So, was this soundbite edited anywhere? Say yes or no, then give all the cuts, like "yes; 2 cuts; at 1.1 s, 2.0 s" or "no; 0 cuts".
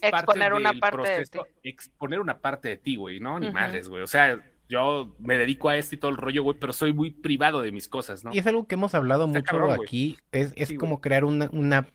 yes; 2 cuts; at 8.3 s, 10.2 s